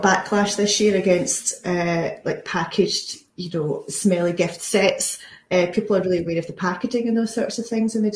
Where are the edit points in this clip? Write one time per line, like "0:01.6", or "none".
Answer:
none